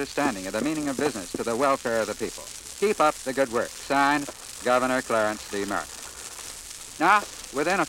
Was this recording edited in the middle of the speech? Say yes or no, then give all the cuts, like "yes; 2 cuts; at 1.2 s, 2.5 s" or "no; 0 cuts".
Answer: no; 0 cuts